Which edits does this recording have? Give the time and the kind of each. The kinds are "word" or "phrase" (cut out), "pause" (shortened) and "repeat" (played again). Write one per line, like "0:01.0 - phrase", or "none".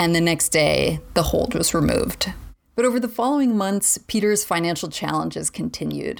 none